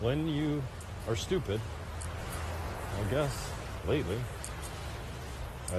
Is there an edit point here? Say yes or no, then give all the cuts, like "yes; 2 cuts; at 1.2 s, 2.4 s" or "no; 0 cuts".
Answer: no; 0 cuts